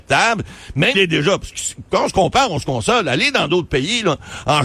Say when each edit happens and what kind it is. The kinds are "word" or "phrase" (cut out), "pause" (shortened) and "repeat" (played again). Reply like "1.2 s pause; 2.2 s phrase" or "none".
0.9 s word